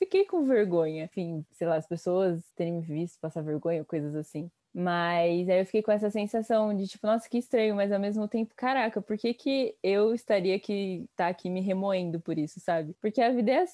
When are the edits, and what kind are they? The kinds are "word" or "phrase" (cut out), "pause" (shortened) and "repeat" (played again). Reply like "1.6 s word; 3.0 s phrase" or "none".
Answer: none